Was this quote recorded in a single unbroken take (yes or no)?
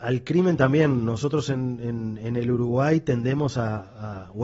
yes